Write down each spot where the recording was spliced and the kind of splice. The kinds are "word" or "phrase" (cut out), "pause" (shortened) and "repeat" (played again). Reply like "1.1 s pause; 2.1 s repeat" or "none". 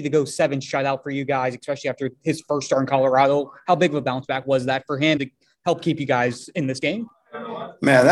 5.2 s word